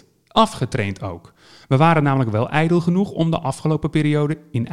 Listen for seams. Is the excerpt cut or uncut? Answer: uncut